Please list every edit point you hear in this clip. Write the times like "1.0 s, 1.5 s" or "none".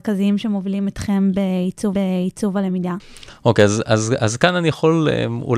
1.9 s